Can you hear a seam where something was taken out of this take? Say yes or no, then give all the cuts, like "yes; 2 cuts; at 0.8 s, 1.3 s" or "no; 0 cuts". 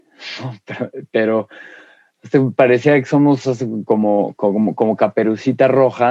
no; 0 cuts